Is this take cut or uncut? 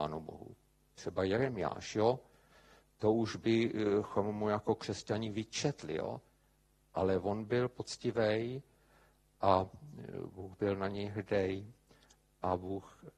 uncut